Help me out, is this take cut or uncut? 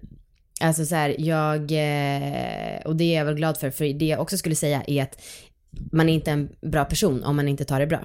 uncut